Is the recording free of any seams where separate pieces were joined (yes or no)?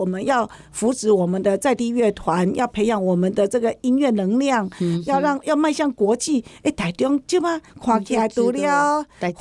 no